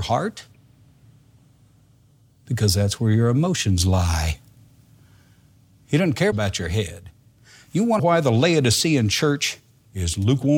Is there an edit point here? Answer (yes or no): yes